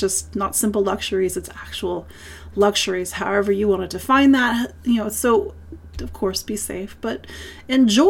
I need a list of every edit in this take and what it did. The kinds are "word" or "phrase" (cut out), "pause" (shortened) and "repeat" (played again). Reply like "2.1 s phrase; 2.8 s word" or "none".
none